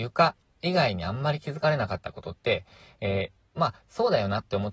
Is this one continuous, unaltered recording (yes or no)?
yes